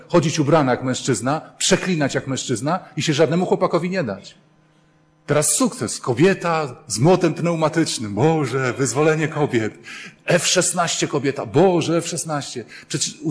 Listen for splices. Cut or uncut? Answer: uncut